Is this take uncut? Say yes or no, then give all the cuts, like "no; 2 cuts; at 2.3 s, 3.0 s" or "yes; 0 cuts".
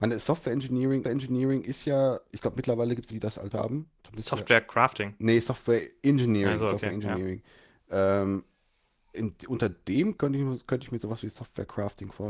no; 6 cuts; at 1.0 s, 3.1 s, 3.5 s, 4.0 s, 9.1 s, 10.2 s